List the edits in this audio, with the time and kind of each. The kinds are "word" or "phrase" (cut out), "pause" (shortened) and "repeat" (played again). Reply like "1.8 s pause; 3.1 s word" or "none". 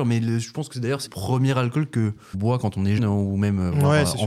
1.1 s word; 2.3 s word; 3.0 s word